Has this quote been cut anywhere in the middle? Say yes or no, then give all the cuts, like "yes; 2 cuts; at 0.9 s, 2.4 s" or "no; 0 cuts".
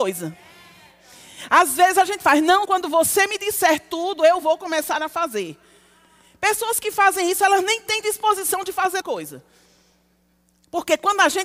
yes; 2 cuts; at 2.6 s, 9.0 s